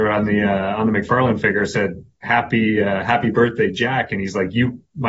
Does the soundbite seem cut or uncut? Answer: uncut